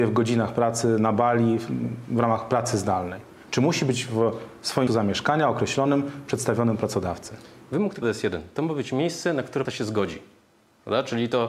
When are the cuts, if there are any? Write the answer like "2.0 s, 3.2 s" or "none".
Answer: 4.9 s, 8.0 s, 9.6 s